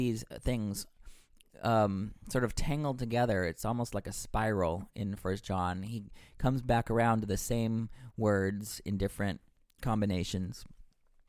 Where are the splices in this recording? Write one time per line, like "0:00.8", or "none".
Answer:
none